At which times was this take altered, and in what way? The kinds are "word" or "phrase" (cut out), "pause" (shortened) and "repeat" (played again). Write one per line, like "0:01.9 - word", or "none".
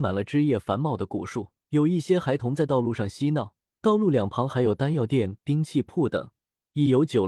0:01.6 - pause
0:03.7 - pause